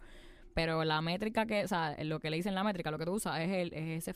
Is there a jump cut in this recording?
no; 0 cuts

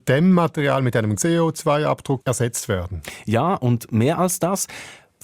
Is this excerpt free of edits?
no; 2 cuts; at 1.2 s, 2.2 s

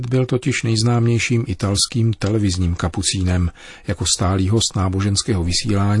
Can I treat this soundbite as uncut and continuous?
yes; 0 cuts

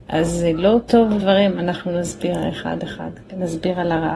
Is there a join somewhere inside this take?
yes; 1 cut; at 1.2 s

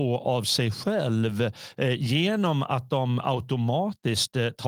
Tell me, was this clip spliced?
no; 0 cuts

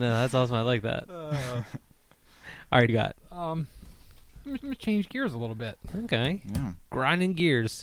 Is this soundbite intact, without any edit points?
no; 4 cuts; at 2.9 s, 3.2 s, 4.6 s, 6.8 s

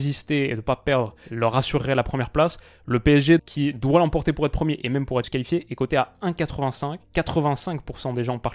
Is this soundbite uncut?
no; 3 cuts; at 3.4 s, 5.2 s, 7.0 s

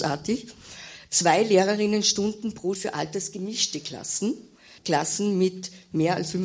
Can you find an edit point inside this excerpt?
yes; 2 cuts; at 2.7 s, 4.8 s

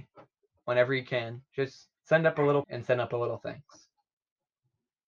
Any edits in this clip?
yes; 2 cuts; at 2.0 s, 2.6 s

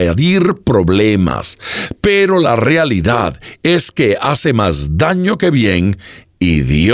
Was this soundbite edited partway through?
no; 0 cuts

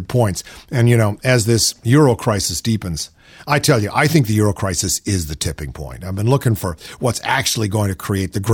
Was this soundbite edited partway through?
no; 0 cuts

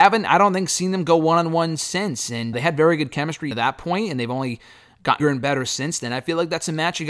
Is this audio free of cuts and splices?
no; 3 cuts; at 2.5 s, 3.5 s, 5.2 s

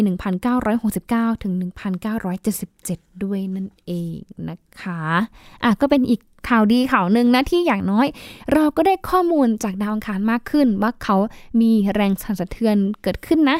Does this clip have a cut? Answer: no; 0 cuts

